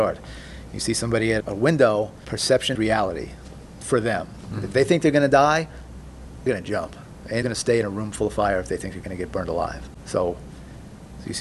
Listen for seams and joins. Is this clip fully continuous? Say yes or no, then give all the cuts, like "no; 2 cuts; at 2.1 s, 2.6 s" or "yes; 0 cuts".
no; 4 cuts; at 1.4 s, 2.8 s, 6.5 s, 7.4 s